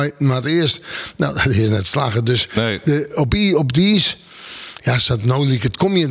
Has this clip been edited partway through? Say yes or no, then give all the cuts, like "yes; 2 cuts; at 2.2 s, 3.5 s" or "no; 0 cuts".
no; 0 cuts